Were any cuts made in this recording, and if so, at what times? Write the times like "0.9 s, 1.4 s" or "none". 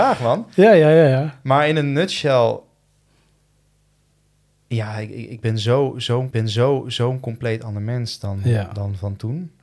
6.3 s